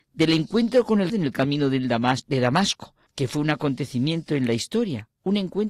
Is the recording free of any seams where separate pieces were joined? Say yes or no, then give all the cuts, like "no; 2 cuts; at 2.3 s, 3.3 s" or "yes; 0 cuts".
no; 2 cuts; at 1.1 s, 3.1 s